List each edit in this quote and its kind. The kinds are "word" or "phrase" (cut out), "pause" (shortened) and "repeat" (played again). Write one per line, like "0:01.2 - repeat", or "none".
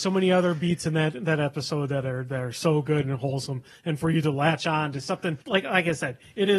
0:05.4 - pause